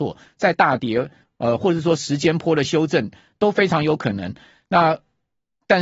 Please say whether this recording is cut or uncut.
uncut